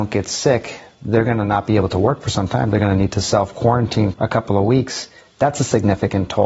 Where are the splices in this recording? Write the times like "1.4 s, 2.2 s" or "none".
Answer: 4.1 s